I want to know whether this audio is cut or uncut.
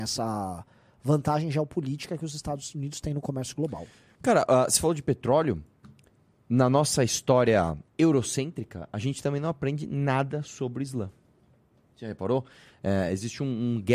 uncut